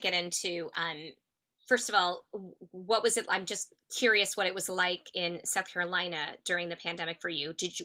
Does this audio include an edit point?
no; 0 cuts

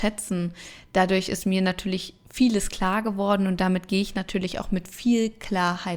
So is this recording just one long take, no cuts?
no; 1 cut; at 2.2 s

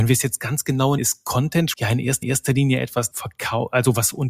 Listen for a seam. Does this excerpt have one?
yes; 4 cuts; at 1.0 s, 1.7 s, 2.2 s, 3.1 s

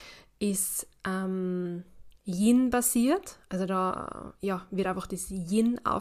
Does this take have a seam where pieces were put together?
no; 0 cuts

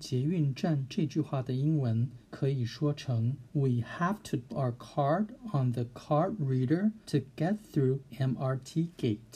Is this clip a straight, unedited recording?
no; 5 cuts; at 2.2 s, 3.5 s, 4.5 s, 7.0 s, 8.1 s

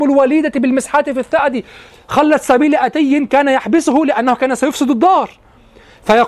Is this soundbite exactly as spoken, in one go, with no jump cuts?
yes; 0 cuts

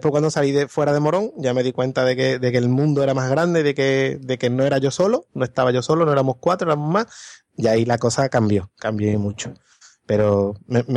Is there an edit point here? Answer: no; 0 cuts

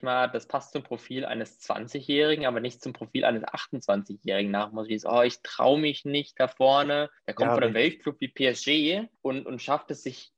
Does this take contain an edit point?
yes; 2 cuts; at 7.2 s, 9.2 s

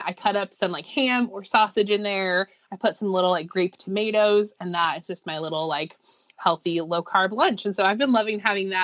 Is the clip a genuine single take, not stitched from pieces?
yes; 0 cuts

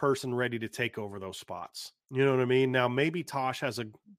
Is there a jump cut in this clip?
yes; 1 cut; at 2.0 s

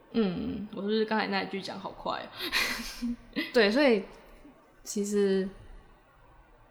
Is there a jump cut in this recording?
no; 0 cuts

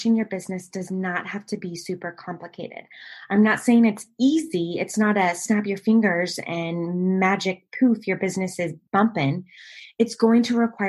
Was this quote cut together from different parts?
no; 0 cuts

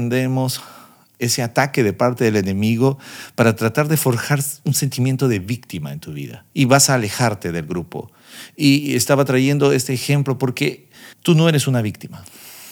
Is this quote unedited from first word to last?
no; 2 cuts; at 6.5 s, 11.1 s

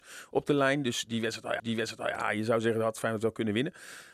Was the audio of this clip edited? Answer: yes; 1 cut; at 1.6 s

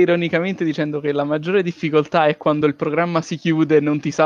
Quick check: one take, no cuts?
yes; 0 cuts

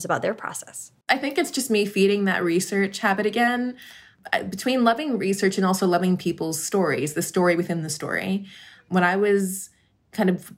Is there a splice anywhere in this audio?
yes; 1 cut; at 1.0 s

